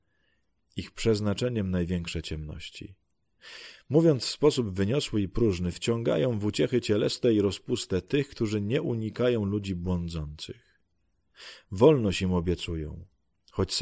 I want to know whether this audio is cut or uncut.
uncut